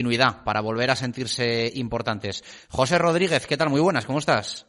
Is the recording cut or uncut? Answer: uncut